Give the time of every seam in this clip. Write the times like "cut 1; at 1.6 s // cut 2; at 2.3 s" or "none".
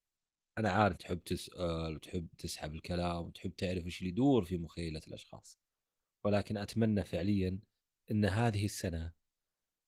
cut 1; at 1.0 s